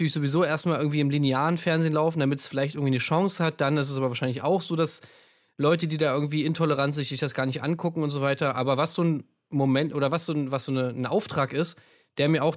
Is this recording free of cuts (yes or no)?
yes